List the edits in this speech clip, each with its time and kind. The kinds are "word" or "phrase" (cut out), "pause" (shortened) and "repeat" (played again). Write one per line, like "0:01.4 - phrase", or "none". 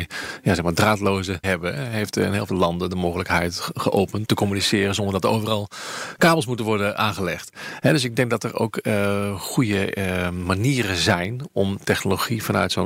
0:01.4 - word
0:02.5 - word
0:04.2 - word